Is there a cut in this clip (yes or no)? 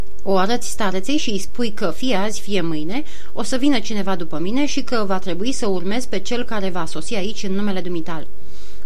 no